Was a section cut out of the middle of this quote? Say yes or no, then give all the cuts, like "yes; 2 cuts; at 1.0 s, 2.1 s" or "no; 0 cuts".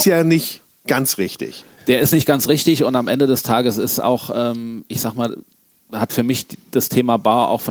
no; 0 cuts